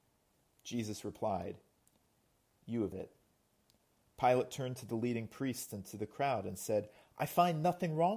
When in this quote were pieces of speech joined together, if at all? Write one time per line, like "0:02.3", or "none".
0:02.9